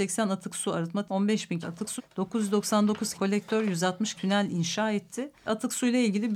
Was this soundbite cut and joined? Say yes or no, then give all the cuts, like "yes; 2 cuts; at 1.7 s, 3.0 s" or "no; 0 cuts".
yes; 6 cuts; at 1.1 s, 1.6 s, 2.0 s, 3.1 s, 4.2 s, 5.5 s